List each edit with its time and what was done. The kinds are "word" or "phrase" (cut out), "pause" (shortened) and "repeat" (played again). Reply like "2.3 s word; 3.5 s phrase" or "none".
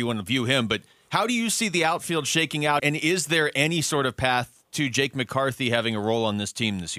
2.8 s word